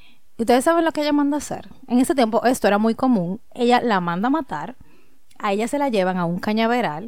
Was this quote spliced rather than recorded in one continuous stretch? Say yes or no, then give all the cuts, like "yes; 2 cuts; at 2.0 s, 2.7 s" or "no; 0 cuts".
no; 0 cuts